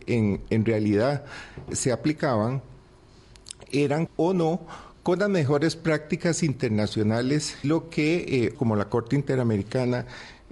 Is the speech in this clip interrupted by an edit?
yes; 4 cuts; at 1.7 s, 4.1 s, 7.6 s, 8.5 s

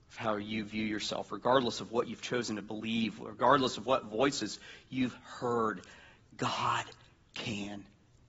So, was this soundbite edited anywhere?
no; 0 cuts

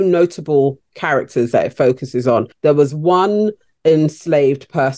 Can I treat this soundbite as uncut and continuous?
yes; 0 cuts

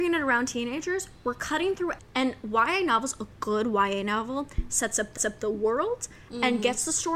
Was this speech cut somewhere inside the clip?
yes; 2 cuts; at 2.0 s, 5.2 s

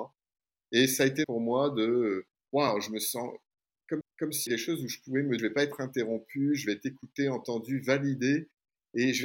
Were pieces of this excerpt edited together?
yes; 5 cuts; at 1.2 s, 2.3 s, 4.0 s, 4.5 s, 5.4 s

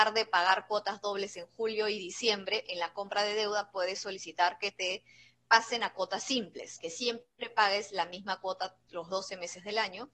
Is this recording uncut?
yes; 0 cuts

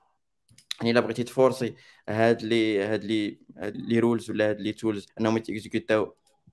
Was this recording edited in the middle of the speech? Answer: yes; 2 cuts; at 3.7 s, 5.1 s

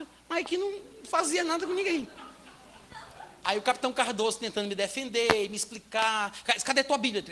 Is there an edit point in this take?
no; 0 cuts

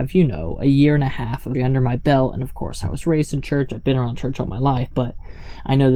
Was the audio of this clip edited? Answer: yes; 1 cut; at 1.5 s

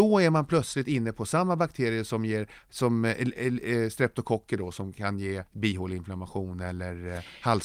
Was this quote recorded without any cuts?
no; 1 cut; at 5.5 s

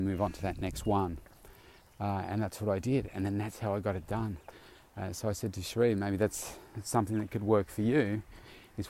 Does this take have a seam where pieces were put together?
no; 0 cuts

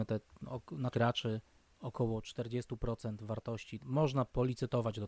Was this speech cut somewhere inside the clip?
yes; 2 cuts; at 0.9 s, 3.8 s

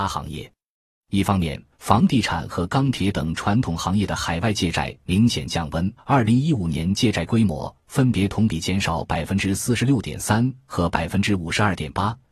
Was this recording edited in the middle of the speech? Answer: yes; 2 cuts; at 1.7 s, 6.0 s

